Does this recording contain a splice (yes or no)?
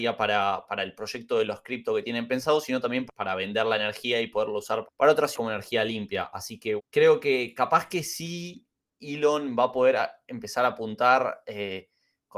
yes